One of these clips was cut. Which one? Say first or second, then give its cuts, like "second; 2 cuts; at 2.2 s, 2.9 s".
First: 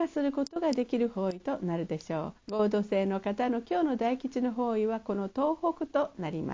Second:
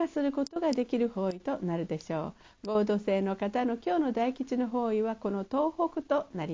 first; 1 cut; at 2.4 s